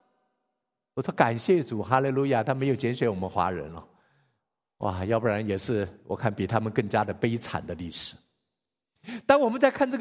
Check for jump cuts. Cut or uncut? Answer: uncut